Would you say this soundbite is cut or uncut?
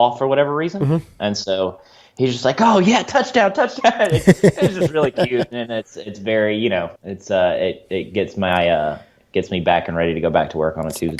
cut